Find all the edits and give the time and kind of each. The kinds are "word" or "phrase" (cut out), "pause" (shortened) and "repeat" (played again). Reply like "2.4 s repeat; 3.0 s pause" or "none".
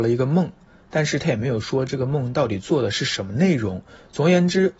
none

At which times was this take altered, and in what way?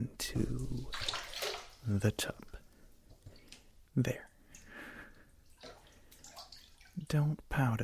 none

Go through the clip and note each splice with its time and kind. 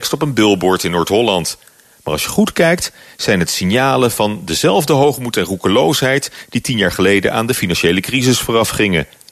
none

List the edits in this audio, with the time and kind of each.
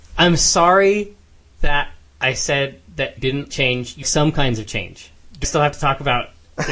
3.2 s word; 3.5 s word; 4.0 s word; 5.4 s word

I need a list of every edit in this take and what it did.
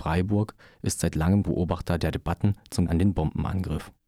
1.4 s word; 2.9 s word

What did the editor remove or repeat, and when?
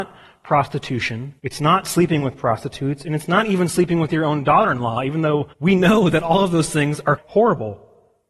1.4 s pause; 5.5 s pause; 7.2 s word

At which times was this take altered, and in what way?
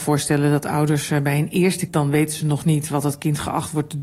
1.9 s word

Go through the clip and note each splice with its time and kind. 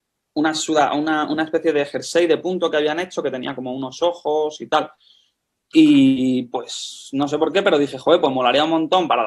none

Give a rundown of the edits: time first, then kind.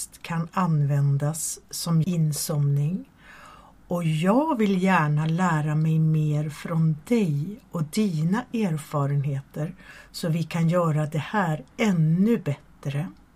2.0 s phrase; 11.7 s pause

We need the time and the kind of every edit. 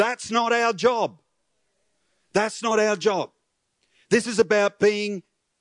none

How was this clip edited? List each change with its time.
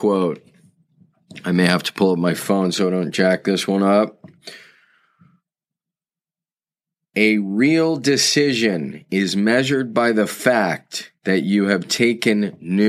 none

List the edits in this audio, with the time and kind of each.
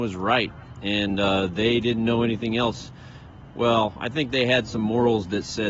none

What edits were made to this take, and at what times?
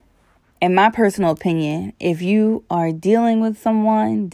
none

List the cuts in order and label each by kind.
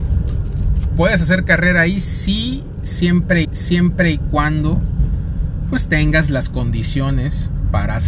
3.4 s repeat

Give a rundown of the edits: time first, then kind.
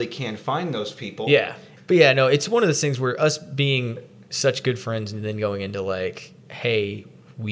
6.4 s pause

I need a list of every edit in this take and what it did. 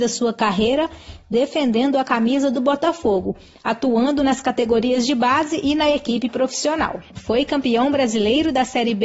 none

